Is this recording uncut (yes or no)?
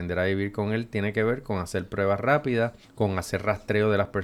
yes